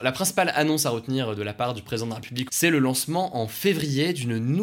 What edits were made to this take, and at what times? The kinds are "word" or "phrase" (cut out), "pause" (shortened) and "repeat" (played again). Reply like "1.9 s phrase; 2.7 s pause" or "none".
2.5 s word